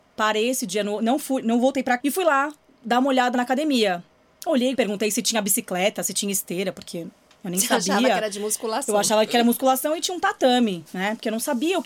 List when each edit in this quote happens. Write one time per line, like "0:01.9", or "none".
0:02.0
0:03.3
0:04.7